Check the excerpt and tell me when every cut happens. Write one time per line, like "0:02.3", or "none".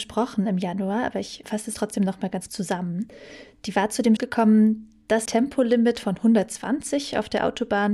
0:01.4
0:01.7
0:02.5
0:04.2
0:05.3